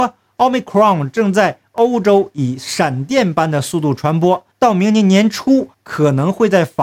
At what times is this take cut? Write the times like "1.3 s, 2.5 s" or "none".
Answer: 4.5 s, 5.7 s